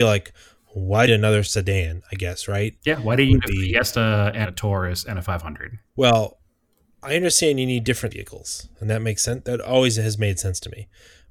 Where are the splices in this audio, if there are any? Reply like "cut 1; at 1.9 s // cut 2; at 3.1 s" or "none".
cut 1; at 1.1 s // cut 2; at 4.4 s // cut 3; at 5.9 s // cut 4; at 8.1 s